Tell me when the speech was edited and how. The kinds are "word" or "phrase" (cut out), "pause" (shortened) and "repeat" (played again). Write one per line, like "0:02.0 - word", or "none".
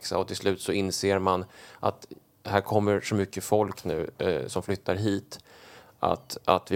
none